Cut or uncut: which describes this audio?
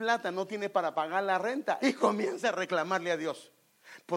cut